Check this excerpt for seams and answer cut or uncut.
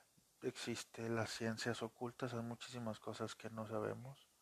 uncut